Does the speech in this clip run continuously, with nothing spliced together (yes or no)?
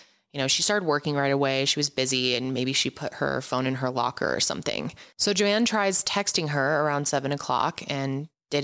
yes